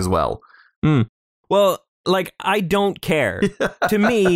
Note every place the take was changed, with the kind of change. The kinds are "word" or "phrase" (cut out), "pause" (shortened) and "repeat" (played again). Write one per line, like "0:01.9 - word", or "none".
none